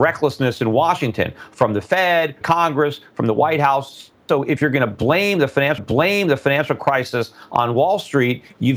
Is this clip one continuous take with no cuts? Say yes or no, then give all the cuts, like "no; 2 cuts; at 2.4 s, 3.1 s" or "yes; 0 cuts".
no; 2 cuts; at 2.4 s, 5.8 s